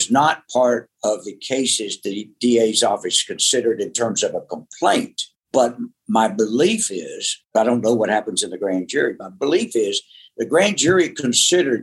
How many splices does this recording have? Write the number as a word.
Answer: zero